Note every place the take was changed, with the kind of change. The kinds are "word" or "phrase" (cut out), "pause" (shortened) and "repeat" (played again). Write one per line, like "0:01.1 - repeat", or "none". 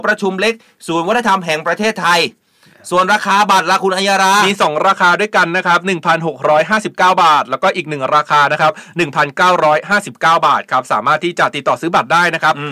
none